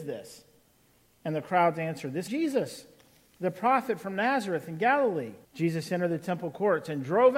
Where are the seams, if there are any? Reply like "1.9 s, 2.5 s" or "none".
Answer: 2.3 s, 5.4 s

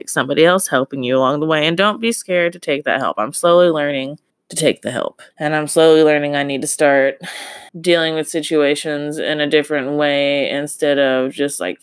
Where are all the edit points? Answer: 4.3 s, 5.3 s, 7.7 s

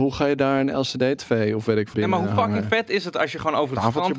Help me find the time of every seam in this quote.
1.9 s

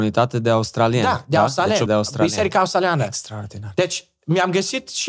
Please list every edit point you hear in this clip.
1.9 s

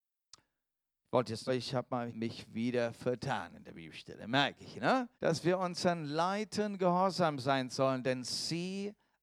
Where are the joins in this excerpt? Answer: 1.5 s, 2.1 s, 5.1 s

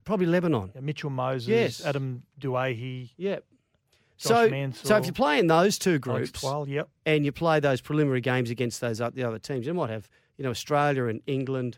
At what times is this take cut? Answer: none

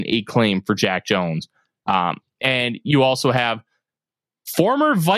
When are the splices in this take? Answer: none

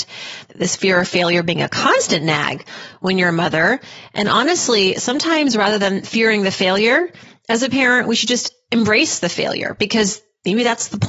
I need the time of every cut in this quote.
none

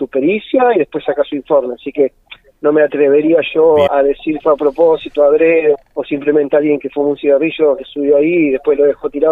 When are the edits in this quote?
3.9 s, 4.4 s, 5.7 s

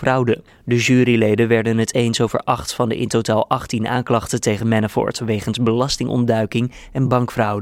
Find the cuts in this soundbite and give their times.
none

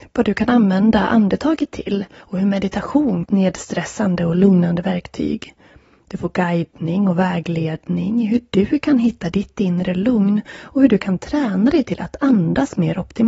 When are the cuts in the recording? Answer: 3.3 s

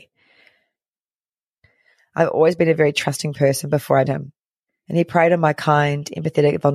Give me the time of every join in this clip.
4.1 s

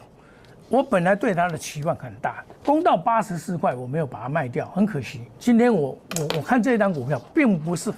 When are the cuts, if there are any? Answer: 2.6 s, 5.3 s

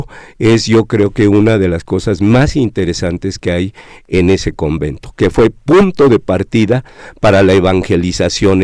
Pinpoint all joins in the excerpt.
none

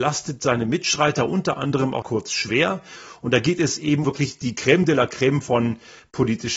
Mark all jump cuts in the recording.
2.0 s, 4.0 s

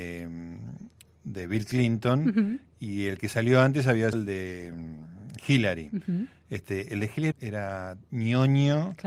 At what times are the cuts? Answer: 4.1 s, 7.3 s

